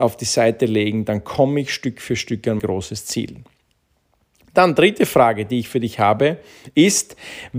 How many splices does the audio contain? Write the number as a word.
one